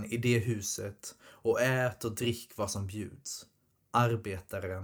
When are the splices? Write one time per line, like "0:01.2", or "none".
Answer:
none